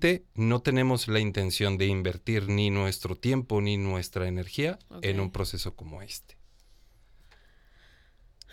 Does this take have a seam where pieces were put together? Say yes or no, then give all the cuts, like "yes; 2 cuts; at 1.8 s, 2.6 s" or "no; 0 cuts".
no; 0 cuts